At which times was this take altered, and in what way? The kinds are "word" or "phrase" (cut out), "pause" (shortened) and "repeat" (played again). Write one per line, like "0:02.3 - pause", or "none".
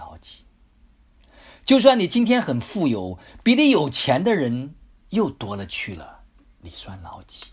none